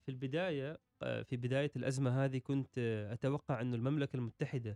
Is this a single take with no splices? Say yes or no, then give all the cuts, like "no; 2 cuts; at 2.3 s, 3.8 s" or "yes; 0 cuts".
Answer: yes; 0 cuts